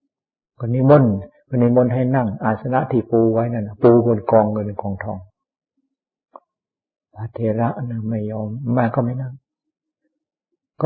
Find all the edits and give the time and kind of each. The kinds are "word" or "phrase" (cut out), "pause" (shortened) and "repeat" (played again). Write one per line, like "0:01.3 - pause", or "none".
none